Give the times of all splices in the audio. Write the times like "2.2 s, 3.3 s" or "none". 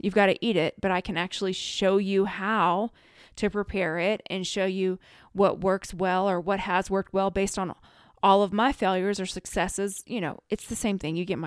none